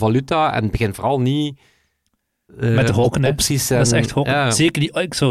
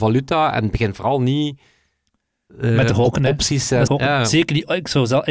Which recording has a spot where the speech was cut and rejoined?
second; 1 cut; at 3.9 s

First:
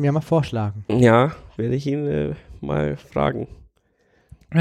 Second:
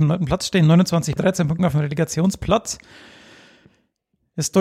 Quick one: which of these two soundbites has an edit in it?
second; 2 cuts; at 1.2 s, 1.6 s

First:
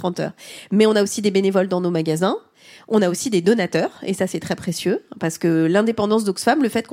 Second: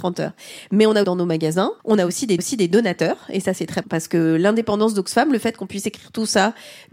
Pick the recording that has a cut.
second; 4 cuts; at 1.0 s, 1.8 s, 2.4 s, 3.8 s

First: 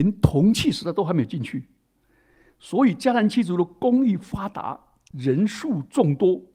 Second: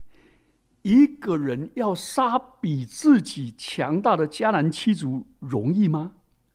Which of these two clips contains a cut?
first; 1 cut; at 5.1 s

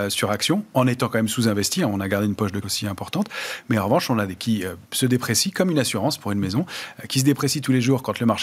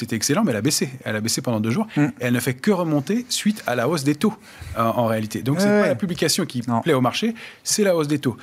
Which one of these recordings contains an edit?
first; 3 cuts; at 2.6 s, 4.4 s, 4.8 s

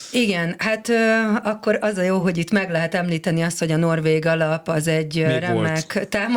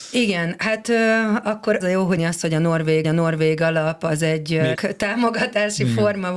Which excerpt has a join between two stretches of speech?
second; 4 cuts; at 1.8 s, 2.2 s, 3.0 s, 4.8 s

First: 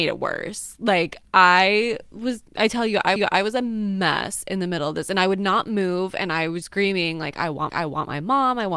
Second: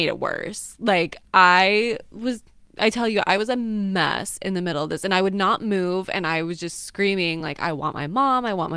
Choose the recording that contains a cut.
first; 4 cuts; at 2.5 s, 3.2 s, 6.6 s, 7.7 s

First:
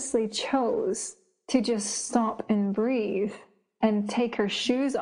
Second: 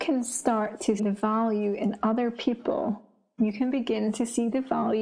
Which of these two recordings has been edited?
second; 1 cut; at 1.0 s

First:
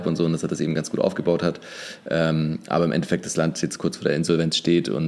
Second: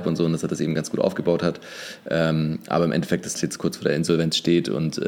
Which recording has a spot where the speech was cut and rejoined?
second; 1 cut; at 3.3 s

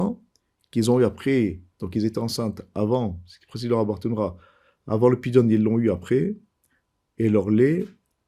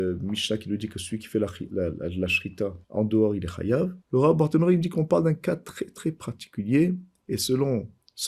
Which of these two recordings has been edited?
second; 2 cuts; at 2.8 s, 4.0 s

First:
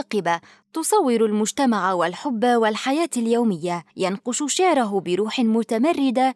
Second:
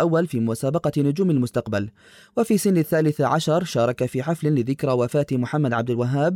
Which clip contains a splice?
first; 1 cut; at 3.9 s

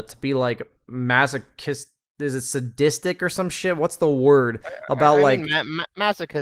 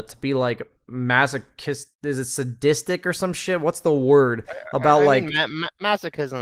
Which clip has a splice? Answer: second; 1 cut; at 1.9 s

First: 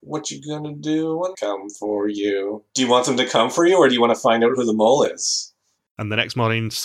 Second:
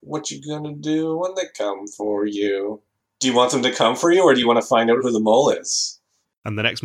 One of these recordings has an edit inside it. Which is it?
first; 2 cuts; at 1.3 s, 2.7 s

